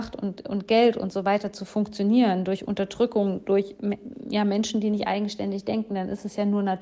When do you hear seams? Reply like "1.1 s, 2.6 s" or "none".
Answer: none